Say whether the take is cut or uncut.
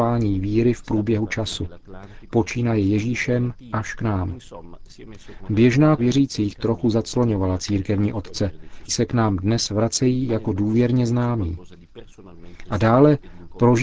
cut